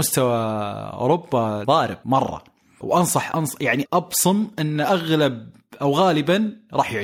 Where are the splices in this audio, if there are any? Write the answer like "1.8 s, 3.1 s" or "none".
1.6 s, 2.0 s, 2.8 s, 3.3 s, 3.8 s